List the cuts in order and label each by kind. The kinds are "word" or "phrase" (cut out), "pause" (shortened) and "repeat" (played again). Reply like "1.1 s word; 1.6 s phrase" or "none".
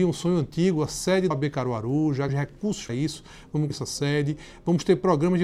1.3 s word; 2.3 s word; 2.9 s word; 3.7 s word